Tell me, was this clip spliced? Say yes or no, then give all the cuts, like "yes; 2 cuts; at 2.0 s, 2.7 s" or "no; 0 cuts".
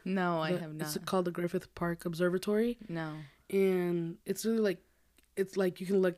yes; 1 cut; at 4.2 s